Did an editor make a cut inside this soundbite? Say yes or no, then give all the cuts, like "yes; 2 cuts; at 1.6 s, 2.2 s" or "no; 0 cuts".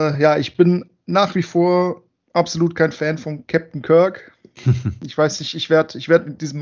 no; 0 cuts